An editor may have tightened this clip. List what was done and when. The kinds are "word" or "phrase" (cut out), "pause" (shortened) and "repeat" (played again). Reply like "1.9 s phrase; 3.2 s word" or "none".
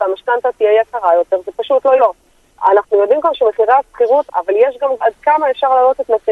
2.0 s word; 4.3 s word; 5.0 s word